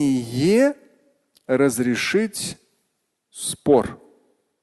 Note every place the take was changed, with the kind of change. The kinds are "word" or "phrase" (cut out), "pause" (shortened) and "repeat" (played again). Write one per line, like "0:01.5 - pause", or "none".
none